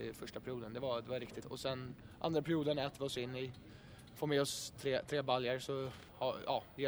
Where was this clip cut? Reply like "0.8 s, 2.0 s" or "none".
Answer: none